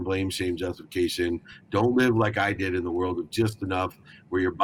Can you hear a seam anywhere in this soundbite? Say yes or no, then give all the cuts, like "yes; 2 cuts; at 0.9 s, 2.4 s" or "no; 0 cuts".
no; 0 cuts